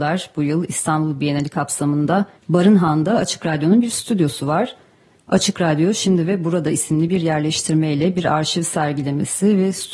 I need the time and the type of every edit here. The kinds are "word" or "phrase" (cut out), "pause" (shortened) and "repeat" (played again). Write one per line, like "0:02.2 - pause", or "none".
0:02.4 - pause